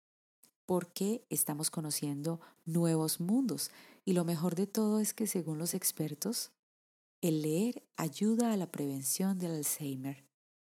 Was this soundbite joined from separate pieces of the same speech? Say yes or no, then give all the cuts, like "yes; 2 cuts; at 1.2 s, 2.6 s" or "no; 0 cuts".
no; 0 cuts